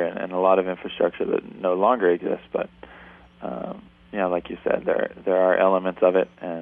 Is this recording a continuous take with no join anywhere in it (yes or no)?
yes